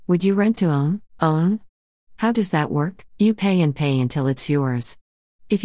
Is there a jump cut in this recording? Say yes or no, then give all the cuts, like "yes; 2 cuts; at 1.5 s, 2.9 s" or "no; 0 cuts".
yes; 2 cuts; at 1.1 s, 3.1 s